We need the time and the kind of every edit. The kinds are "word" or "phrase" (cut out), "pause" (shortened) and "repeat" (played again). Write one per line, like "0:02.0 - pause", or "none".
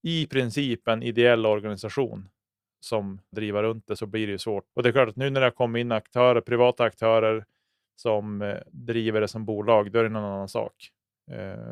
0:03.3 - word
0:04.0 - word
0:04.7 - pause
0:08.7 - pause